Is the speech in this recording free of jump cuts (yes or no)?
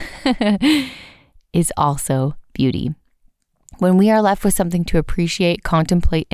yes